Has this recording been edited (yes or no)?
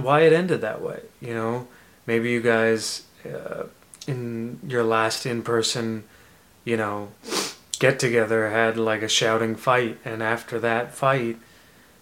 no